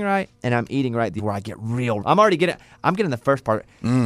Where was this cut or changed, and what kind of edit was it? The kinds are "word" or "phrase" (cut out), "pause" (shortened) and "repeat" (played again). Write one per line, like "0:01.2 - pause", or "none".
0:01.2 - word
0:02.0 - word